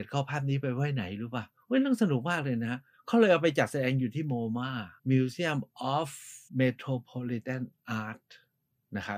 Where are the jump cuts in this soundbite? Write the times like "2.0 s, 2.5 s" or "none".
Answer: 2.9 s, 5.0 s, 6.5 s